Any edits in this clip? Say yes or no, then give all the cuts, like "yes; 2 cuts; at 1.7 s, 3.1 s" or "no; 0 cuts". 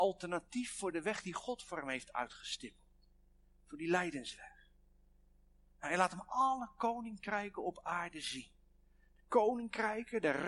no; 0 cuts